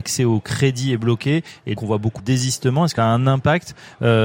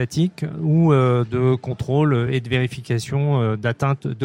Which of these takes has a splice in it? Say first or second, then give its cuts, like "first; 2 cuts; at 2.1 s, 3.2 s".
first; 3 cuts; at 1.8 s, 2.2 s, 3.0 s